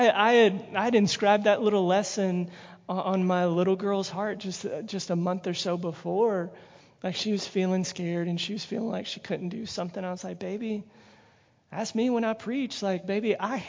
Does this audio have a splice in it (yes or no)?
no